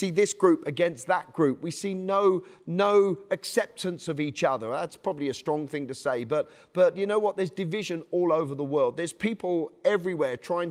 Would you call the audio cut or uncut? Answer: uncut